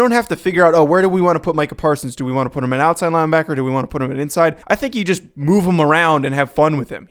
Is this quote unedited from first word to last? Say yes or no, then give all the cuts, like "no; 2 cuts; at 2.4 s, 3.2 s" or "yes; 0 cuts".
no; 1 cut; at 4.6 s